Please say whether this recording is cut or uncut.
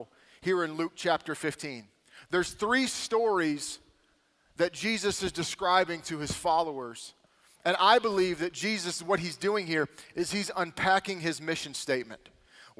uncut